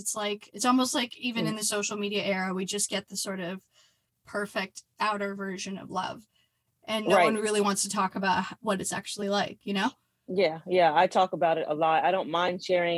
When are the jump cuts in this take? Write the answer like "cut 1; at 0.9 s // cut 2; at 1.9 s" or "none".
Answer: none